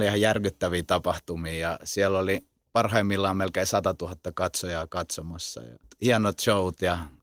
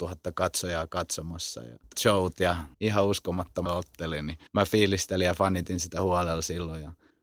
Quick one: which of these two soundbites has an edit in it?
second; 4 cuts; at 1.9 s, 2.7 s, 3.7 s, 4.5 s

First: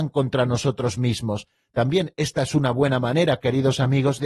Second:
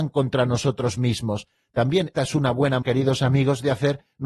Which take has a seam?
second; 2 cuts; at 2.1 s, 2.8 s

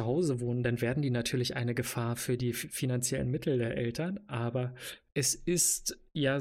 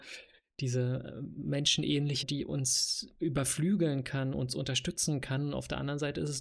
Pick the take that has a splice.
second; 1 cut; at 2.2 s

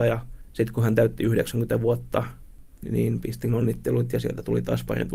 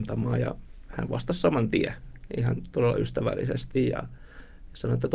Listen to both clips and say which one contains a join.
first; 1 cut; at 2.8 s

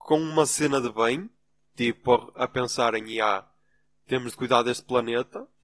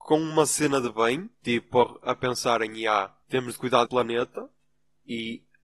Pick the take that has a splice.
second; 3 cuts; at 1.3 s, 3.2 s, 3.9 s

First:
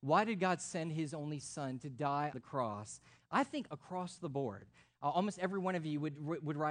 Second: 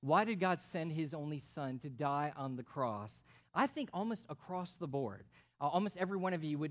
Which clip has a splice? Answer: first; 2 cuts; at 2.3 s, 3.7 s

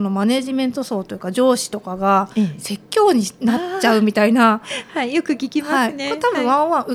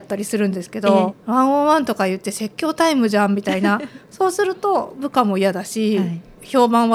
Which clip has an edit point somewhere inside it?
second; 1 cut; at 1.1 s

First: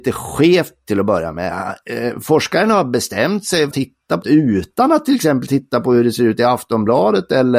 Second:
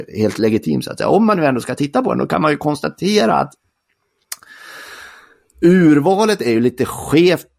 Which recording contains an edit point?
first; 2 cuts; at 3.7 s, 4.2 s

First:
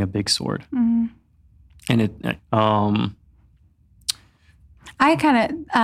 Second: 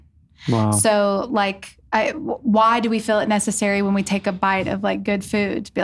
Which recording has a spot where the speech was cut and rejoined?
first; 1 cut; at 2.4 s

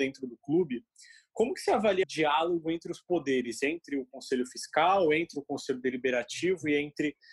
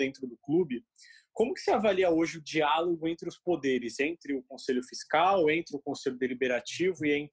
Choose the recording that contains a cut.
first; 1 cut; at 2.0 s

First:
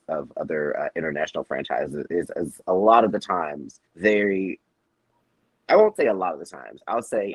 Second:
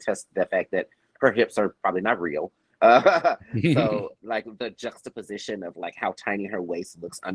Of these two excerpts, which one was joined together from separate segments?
first; 1 cut; at 3.9 s

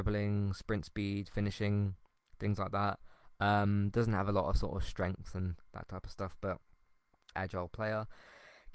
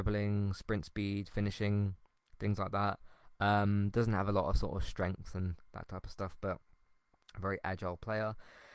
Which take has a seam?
first; 1 cut; at 7.3 s

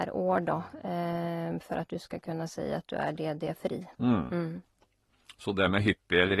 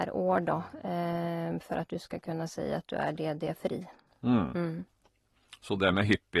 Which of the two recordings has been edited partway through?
first; 1 cut; at 3.9 s

